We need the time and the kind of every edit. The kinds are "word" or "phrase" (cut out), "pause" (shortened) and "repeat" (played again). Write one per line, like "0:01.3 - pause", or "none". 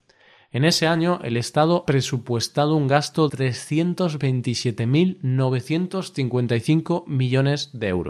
0:01.9 - word
0:03.3 - word